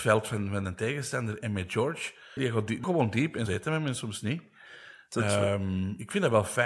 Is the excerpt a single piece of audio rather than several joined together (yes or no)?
no